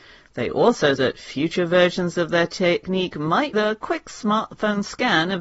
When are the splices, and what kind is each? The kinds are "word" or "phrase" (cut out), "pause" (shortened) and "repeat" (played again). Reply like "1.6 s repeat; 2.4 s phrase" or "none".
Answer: 1.0 s word; 3.5 s phrase